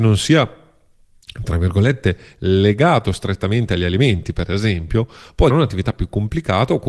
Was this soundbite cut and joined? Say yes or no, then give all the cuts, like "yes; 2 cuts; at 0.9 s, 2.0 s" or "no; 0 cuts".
yes; 1 cut; at 5.5 s